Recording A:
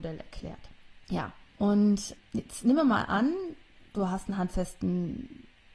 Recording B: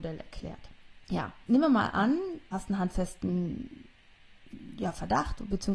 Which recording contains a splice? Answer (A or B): B